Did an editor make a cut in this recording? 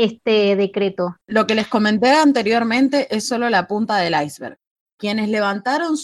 yes; 1 cut; at 1.2 s

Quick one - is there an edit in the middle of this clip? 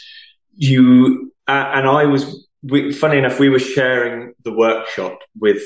yes; 1 cut; at 1.4 s

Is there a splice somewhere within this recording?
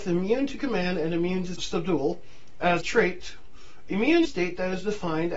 yes; 3 cuts; at 1.6 s, 2.8 s, 4.2 s

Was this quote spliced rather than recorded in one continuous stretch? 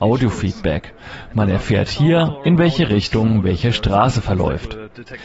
no; 0 cuts

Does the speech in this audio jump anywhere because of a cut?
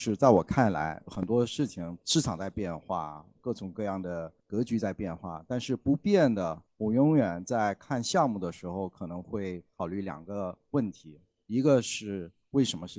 yes; 3 cuts; at 4.4 s, 6.7 s, 9.7 s

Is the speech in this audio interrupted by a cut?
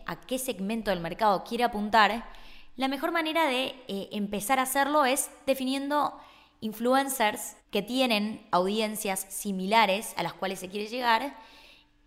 yes; 1 cut; at 7.6 s

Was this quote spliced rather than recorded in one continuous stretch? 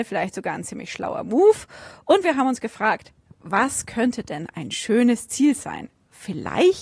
no; 0 cuts

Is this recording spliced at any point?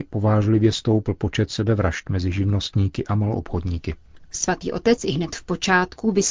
no; 0 cuts

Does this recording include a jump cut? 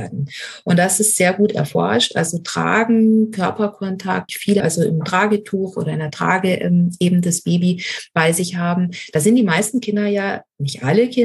yes; 2 cuts; at 4.3 s, 4.6 s

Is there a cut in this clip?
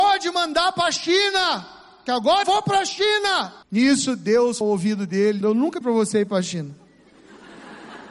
yes; 5 cuts; at 2.4 s, 3.6 s, 4.6 s, 5.4 s, 5.8 s

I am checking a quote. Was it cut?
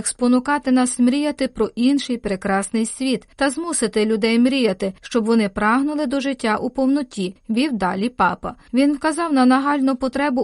no; 0 cuts

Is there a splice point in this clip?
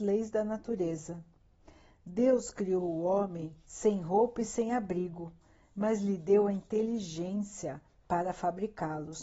no; 0 cuts

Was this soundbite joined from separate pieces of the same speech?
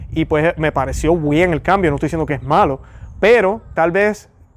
no; 0 cuts

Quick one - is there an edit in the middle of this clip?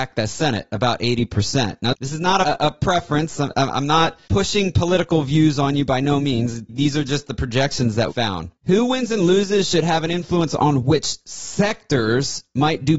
yes; 2 cuts; at 4.2 s, 8.1 s

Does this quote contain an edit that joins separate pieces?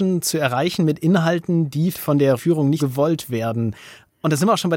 yes; 3 cuts; at 1.9 s, 2.4 s, 2.8 s

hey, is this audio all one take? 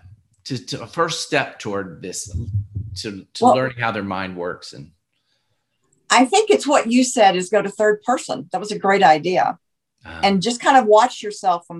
yes; 0 cuts

